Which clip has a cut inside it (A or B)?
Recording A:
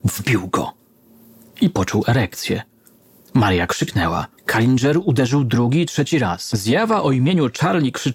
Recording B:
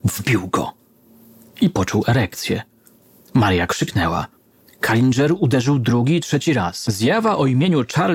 A